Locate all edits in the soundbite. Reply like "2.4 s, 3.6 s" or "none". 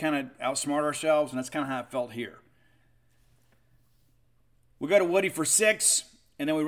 none